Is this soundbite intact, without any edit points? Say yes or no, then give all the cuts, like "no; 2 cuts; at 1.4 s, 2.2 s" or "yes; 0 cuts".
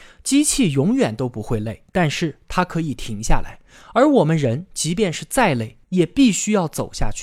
no; 1 cut; at 1.9 s